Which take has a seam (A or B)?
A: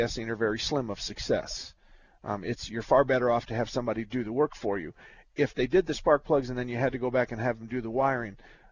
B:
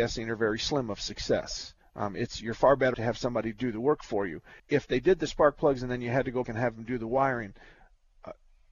B